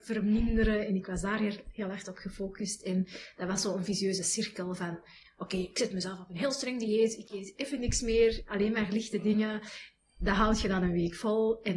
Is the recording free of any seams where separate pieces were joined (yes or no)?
yes